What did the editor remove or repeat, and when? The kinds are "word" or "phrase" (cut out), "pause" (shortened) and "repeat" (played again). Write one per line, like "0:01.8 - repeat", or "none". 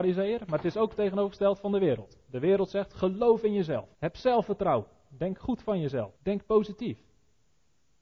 0:03.9 - pause
0:06.2 - pause